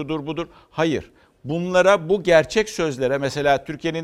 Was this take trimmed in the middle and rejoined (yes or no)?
no